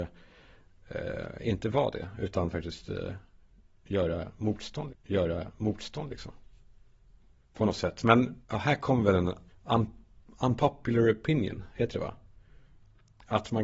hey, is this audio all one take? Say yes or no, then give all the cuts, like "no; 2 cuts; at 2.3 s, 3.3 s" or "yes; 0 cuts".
no; 3 cuts; at 4.9 s, 8.4 s, 9.5 s